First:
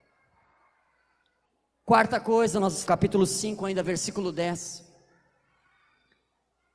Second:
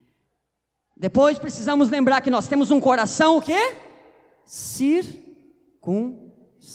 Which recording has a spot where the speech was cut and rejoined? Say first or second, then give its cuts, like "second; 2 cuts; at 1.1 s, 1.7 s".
first; 1 cut; at 2.9 s